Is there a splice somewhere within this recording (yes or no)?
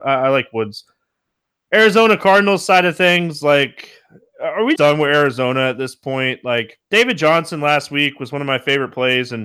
yes